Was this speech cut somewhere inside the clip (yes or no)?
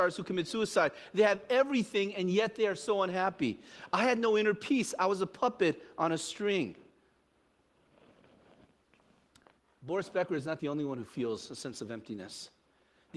no